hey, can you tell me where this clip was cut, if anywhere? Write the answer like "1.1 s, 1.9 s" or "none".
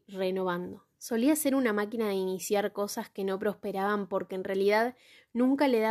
0.9 s

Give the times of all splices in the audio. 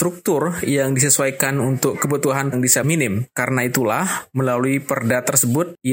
2.5 s, 2.8 s

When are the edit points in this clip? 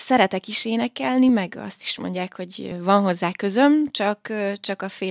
none

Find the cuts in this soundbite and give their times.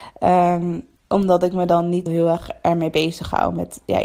1.0 s, 2.1 s

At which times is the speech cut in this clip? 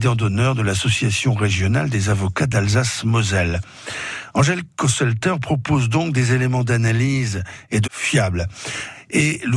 7.8 s

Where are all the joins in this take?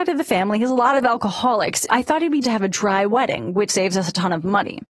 1.9 s, 2.4 s, 3.7 s

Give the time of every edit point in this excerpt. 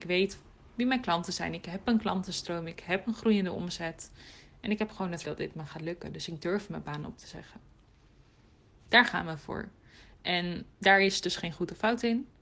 5.2 s, 10.7 s

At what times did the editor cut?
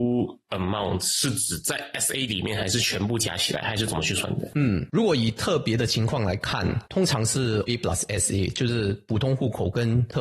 7.7 s

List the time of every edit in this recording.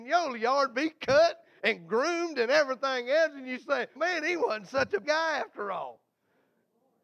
4.0 s, 5.0 s

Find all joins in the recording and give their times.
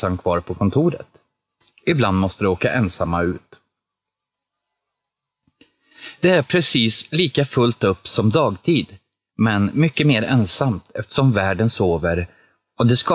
none

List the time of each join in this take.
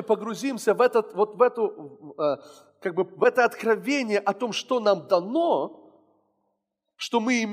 none

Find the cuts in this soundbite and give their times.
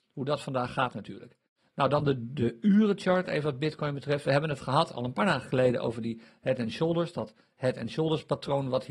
none

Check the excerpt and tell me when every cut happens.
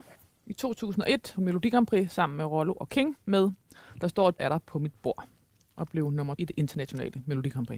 1.4 s, 4.4 s, 6.4 s

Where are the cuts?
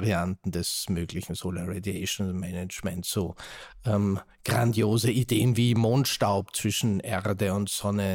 none

